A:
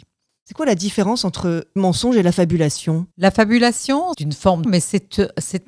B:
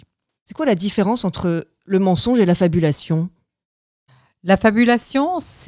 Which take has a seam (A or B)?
A